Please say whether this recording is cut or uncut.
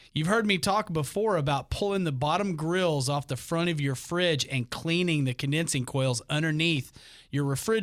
uncut